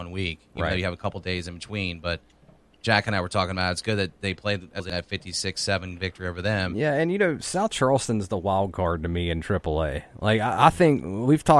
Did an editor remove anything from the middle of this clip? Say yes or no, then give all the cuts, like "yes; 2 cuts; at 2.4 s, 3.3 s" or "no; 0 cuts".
no; 0 cuts